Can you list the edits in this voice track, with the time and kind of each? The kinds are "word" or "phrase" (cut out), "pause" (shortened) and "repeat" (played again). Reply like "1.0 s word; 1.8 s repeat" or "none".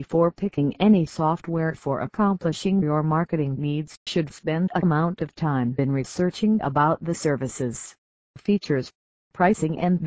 4.1 s word; 4.8 s word